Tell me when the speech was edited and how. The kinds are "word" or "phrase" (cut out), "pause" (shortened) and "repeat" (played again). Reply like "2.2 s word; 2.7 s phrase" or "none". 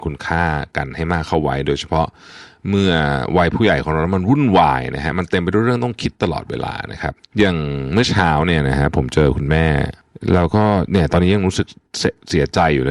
none